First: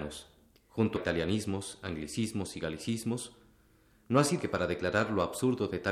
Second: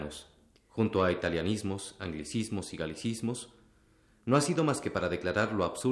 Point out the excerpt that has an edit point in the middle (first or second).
first